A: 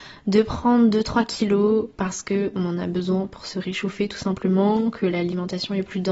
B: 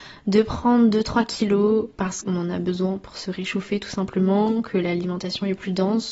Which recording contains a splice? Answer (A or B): B